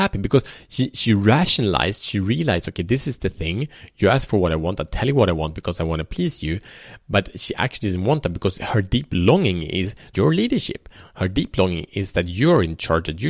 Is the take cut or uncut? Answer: cut